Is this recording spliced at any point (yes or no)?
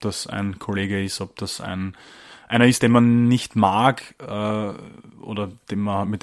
no